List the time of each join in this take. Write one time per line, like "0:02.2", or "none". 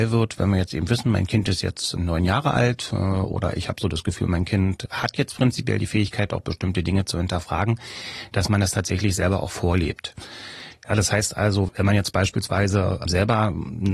0:02.0